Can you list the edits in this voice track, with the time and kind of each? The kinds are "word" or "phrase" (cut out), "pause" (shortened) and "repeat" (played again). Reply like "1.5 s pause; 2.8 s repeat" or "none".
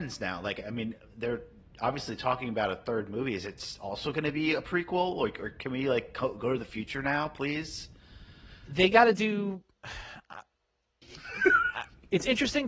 none